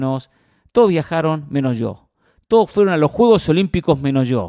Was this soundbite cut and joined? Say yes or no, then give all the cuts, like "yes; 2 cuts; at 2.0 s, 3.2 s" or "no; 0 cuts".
no; 0 cuts